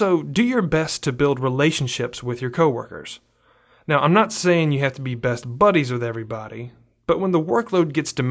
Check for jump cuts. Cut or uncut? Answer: uncut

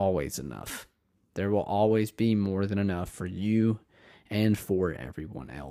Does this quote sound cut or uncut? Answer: uncut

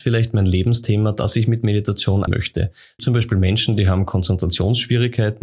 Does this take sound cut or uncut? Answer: cut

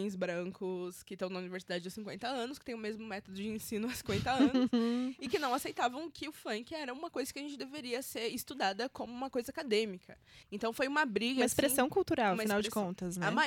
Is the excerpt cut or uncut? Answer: cut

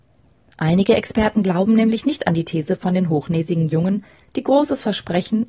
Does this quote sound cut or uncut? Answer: uncut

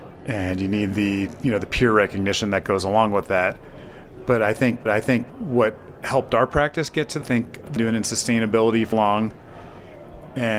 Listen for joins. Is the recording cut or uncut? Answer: cut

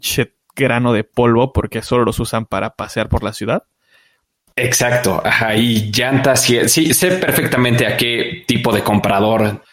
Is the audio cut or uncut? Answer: uncut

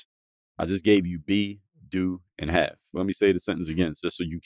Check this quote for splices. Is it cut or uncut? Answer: uncut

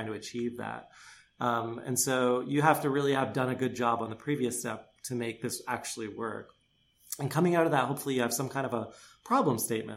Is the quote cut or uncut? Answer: uncut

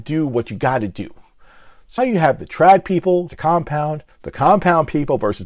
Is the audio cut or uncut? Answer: cut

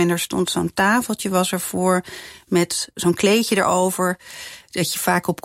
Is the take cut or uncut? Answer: uncut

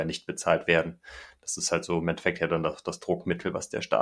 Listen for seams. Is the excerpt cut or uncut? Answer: uncut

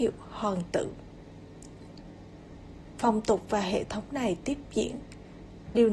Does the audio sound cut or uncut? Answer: uncut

